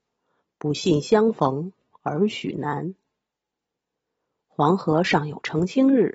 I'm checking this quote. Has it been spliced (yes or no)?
no